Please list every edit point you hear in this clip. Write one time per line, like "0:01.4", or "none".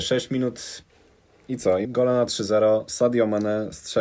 0:01.8